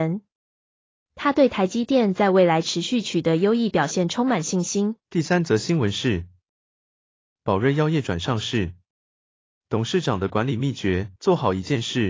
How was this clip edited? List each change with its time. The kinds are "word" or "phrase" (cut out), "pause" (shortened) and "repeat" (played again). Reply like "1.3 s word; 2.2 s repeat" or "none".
5.0 s pause; 11.2 s pause